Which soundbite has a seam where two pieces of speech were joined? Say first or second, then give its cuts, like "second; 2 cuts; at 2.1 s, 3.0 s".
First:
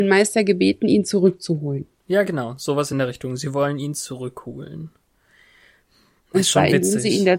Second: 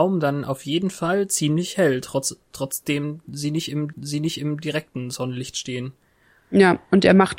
second; 1 cut; at 3.9 s